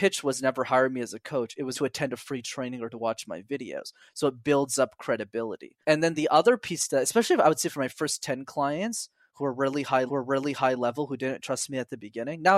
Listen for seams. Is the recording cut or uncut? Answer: cut